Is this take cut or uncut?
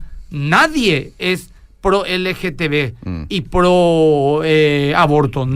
uncut